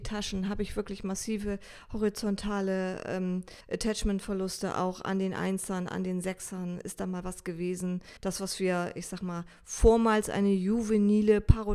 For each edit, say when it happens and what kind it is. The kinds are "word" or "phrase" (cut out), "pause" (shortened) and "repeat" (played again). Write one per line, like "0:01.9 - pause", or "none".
0:03.6 - pause
0:08.2 - pause